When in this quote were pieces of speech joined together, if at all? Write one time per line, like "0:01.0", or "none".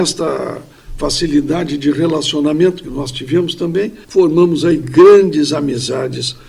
0:04.0

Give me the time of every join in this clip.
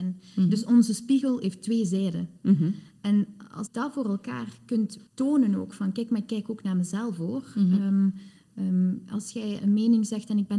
0:03.7
0:05.1

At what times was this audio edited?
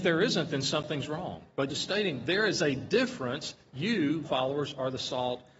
0:01.7
0:04.2

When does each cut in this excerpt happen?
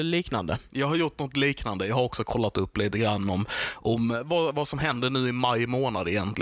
none

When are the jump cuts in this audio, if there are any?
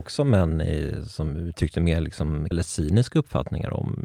0:02.5

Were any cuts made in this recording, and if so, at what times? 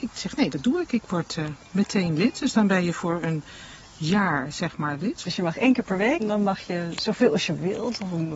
0:06.2

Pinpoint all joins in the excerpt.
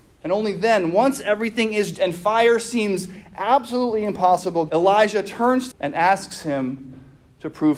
0:01.9
0:05.7

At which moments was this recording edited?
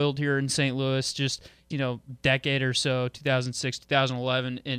0:01.7

